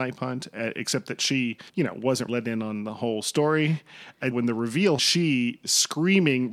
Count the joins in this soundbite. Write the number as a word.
four